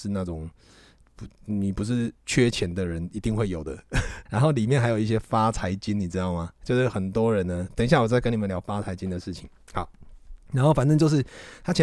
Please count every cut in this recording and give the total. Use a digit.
2